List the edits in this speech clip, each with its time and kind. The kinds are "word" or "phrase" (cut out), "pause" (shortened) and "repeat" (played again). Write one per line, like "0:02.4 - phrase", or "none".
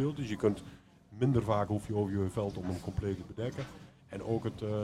none

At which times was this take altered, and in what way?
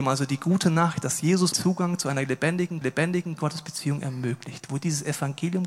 0:01.5 - word
0:02.8 - repeat

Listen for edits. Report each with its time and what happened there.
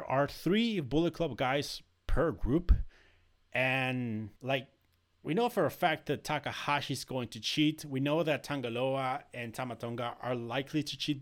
0:04.4 - pause

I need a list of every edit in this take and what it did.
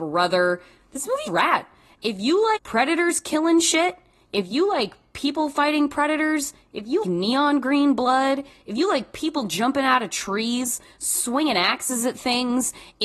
0:01.3 - word
0:02.6 - word
0:07.0 - word

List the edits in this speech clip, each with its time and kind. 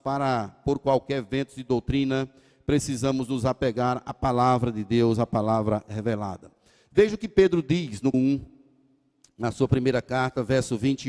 0:08.1 - word

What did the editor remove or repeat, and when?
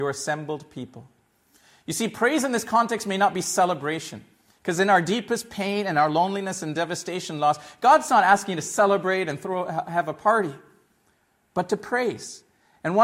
none

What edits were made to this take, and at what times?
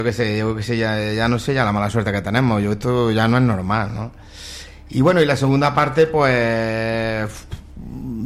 none

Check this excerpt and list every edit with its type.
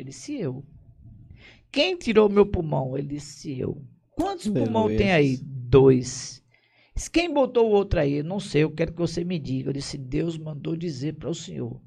none

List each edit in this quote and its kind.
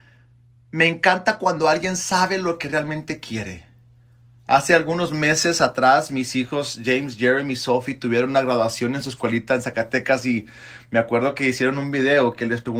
none

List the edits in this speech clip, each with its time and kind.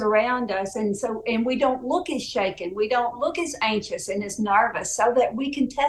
none

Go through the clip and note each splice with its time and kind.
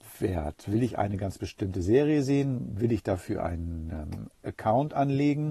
none

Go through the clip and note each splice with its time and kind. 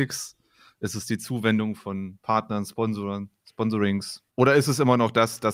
0:04.3 - pause

